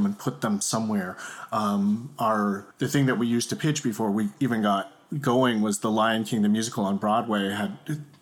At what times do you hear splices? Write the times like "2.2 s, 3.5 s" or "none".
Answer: 2.7 s